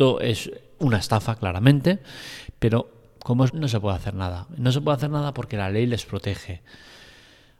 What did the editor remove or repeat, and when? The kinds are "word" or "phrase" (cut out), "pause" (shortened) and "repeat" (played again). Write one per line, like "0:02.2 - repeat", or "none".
0:03.5 - word